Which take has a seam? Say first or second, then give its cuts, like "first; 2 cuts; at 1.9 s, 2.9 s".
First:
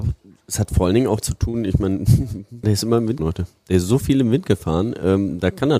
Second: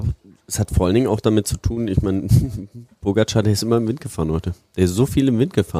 first; 3 cuts; at 1.2 s, 2.6 s, 3.2 s